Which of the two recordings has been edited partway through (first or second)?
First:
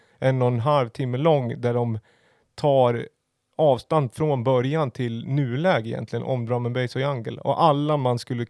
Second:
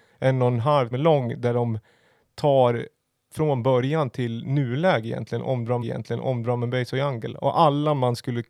second